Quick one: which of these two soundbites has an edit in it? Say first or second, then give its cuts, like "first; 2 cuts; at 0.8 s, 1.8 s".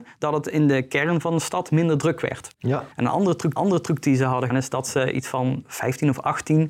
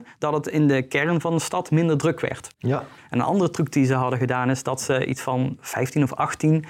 first; 3 cuts; at 2.9 s, 3.6 s, 4.5 s